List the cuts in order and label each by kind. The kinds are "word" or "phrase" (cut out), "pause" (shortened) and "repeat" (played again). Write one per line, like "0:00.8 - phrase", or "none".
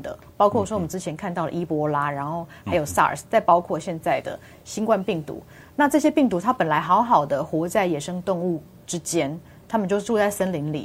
none

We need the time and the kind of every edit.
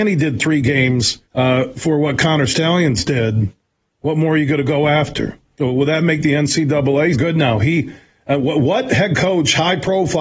0:01.3 - pause
0:07.1 - phrase

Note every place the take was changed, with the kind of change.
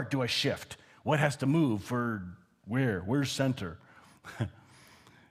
none

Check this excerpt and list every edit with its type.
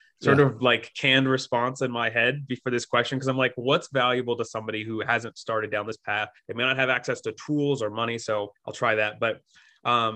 0:06.4 - pause
0:08.6 - pause

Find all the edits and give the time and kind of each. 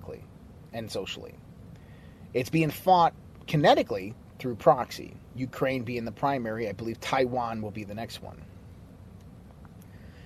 none

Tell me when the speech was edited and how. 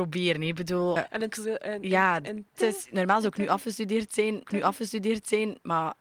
0:01.0 - word
0:02.5 - word
0:04.5 - repeat

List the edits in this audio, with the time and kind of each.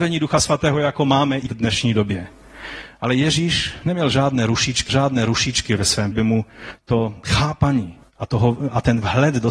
0:01.5 - word
0:04.9 - repeat
0:06.1 - phrase
0:08.0 - pause

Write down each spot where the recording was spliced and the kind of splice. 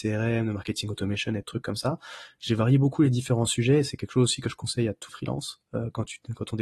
0:05.1 - word

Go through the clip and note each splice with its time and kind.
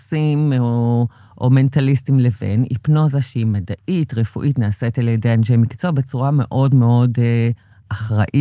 none

